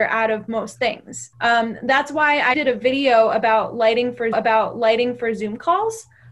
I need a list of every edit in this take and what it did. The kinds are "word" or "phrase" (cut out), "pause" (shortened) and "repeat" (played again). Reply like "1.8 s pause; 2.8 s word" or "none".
1.3 s pause; 2.5 s word; 4.3 s repeat